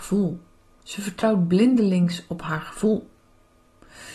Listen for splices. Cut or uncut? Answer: uncut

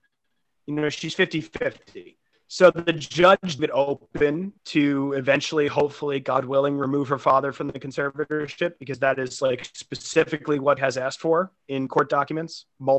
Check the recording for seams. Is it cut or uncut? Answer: cut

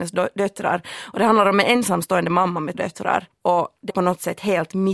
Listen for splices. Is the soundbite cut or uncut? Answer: cut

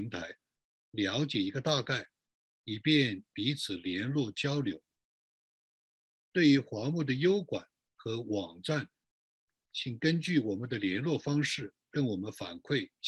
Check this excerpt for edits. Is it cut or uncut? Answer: uncut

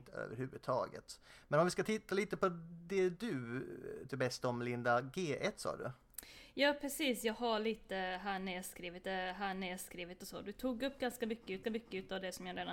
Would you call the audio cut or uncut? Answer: cut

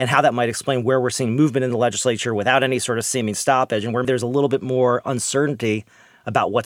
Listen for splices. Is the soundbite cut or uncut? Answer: cut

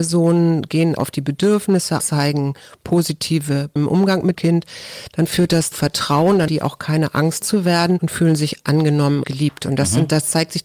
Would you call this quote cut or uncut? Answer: cut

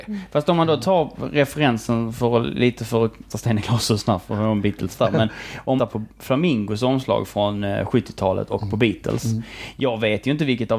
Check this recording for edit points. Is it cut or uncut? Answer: cut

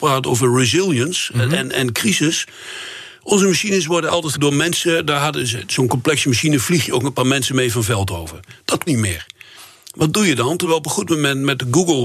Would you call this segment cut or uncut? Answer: cut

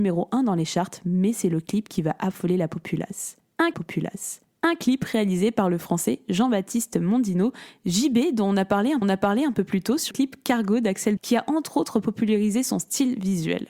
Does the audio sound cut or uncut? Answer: cut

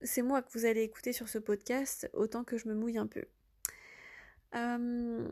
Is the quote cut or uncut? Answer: uncut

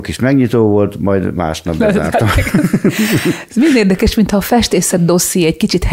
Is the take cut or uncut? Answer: uncut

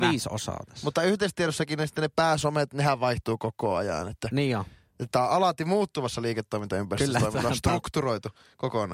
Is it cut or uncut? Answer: uncut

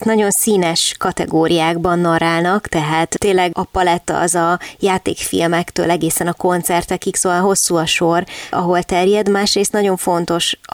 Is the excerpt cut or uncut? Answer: uncut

